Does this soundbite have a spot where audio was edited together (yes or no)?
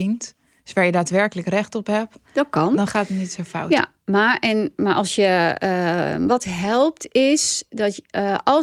no